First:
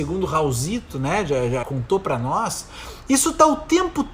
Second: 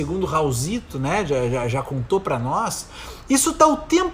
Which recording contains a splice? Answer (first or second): first